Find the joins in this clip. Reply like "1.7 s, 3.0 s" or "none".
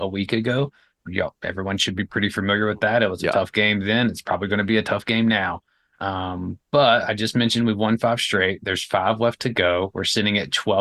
6.6 s